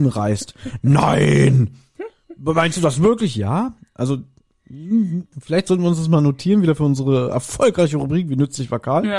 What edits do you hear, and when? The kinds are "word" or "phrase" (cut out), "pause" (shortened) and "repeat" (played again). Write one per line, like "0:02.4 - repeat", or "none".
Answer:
none